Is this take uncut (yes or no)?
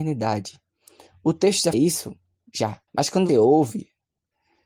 no